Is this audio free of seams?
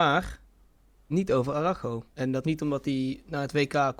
no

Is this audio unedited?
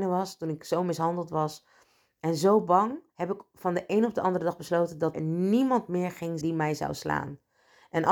no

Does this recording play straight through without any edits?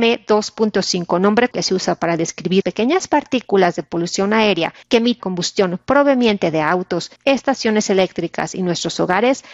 no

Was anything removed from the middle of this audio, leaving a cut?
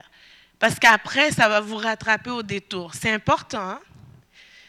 no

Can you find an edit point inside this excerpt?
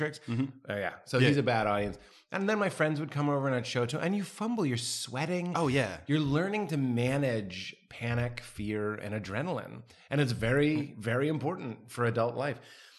no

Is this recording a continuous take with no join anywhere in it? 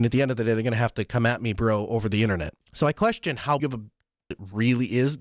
no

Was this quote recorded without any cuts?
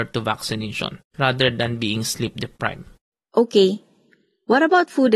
no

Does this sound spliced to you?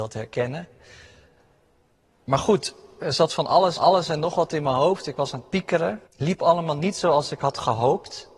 yes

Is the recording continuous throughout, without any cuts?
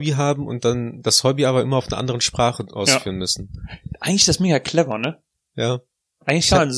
yes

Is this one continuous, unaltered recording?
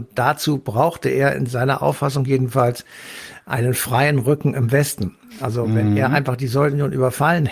yes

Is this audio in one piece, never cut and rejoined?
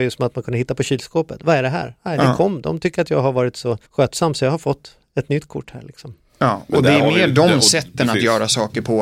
no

